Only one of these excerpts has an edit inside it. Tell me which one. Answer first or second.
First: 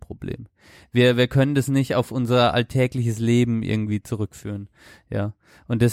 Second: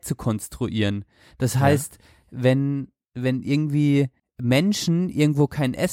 second